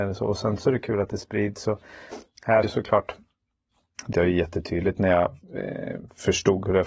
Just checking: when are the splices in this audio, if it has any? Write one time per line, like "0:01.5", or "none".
0:02.6
0:04.1
0:05.4